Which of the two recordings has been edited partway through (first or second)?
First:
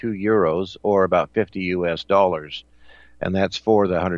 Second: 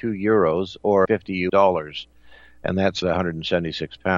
second